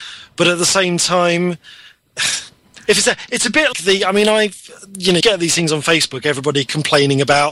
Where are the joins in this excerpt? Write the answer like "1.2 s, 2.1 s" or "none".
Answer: 3.7 s, 5.2 s